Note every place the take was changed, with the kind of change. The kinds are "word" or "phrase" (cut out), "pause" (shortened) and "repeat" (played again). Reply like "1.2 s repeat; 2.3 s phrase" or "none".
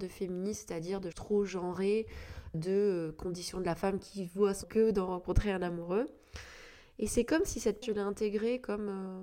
1.1 s word; 2.5 s word; 4.6 s word; 7.8 s word